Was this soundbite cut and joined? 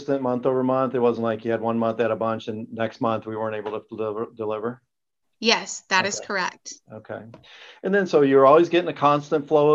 no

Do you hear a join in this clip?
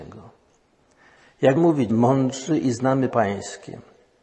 yes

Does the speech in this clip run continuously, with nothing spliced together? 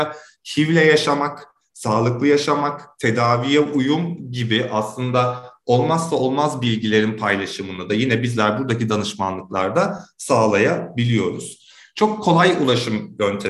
yes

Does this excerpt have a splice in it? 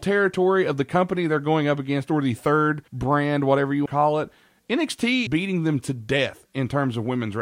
yes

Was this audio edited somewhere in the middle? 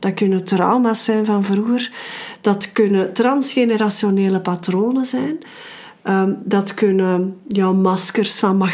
no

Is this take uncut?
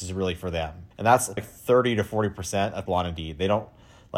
no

